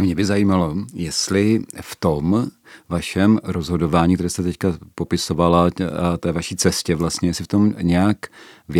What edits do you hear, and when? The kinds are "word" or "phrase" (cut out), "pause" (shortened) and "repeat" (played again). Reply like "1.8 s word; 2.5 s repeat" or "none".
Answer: none